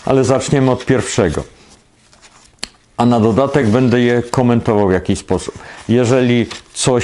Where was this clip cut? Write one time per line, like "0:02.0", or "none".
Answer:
none

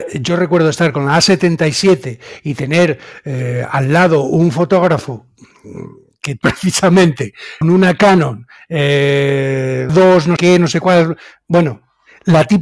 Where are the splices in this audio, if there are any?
0:06.4
0:07.6
0:09.9
0:10.4

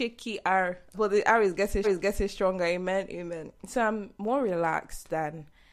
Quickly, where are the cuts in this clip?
0:00.9
0:01.8

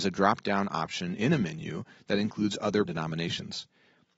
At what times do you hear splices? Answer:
0:02.8

